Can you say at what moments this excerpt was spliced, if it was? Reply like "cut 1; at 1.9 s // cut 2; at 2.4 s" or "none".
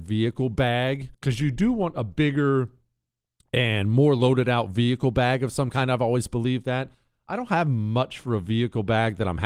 cut 1; at 1.1 s